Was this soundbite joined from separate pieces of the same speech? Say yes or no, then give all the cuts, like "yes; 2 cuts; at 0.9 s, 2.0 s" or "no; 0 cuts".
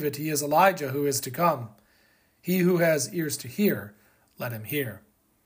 no; 0 cuts